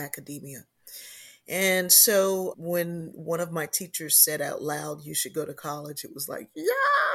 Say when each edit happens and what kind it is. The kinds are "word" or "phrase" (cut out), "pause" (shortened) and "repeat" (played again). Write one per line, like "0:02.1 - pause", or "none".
0:02.5 - word